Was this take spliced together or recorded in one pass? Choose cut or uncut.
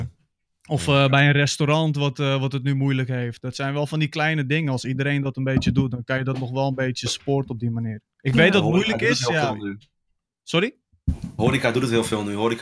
uncut